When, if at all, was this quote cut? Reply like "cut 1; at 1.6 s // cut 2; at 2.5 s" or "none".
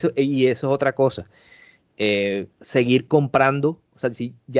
cut 1; at 2.5 s